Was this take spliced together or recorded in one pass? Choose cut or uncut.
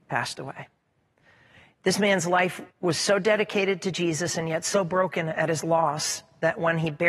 cut